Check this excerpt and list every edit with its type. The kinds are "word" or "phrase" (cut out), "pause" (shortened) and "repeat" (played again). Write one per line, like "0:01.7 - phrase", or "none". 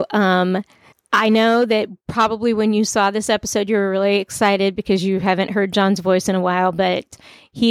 0:00.9 - pause